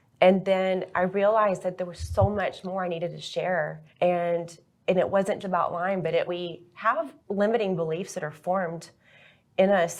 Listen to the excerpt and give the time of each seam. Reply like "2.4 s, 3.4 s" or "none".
3.9 s, 5.4 s, 6.3 s, 7.2 s